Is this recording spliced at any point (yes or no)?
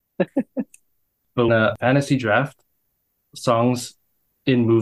yes